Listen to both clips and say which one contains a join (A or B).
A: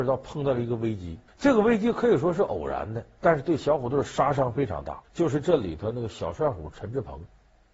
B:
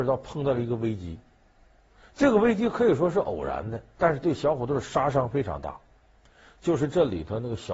A